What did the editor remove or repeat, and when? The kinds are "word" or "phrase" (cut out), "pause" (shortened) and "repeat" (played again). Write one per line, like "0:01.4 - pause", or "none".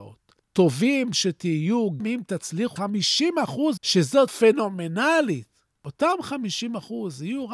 0:01.1 - word
0:02.0 - word
0:02.8 - word
0:03.8 - word
0:04.3 - word